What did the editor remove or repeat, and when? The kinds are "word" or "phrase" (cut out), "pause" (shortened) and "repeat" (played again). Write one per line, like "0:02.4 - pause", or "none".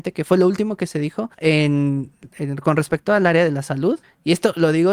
0:01.3 - pause
0:04.0 - pause